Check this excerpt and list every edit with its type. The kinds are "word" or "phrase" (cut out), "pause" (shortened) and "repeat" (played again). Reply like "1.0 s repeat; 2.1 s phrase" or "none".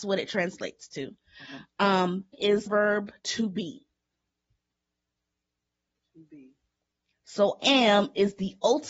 2.3 s word; 2.7 s word; 7.6 s word